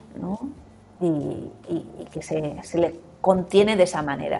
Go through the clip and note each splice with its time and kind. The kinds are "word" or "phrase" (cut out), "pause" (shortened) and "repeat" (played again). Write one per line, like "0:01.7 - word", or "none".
none